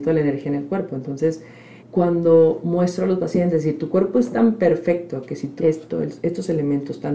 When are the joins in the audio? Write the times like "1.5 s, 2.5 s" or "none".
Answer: 1.8 s, 5.6 s